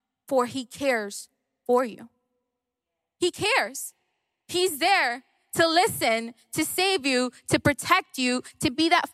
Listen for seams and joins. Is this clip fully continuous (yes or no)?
yes